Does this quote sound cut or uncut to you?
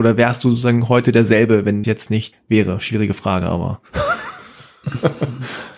cut